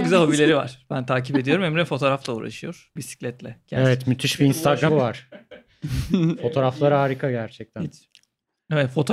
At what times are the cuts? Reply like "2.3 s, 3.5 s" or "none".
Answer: 3.0 s, 4.9 s